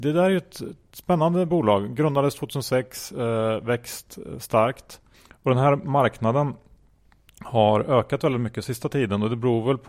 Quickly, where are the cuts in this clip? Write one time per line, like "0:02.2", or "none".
none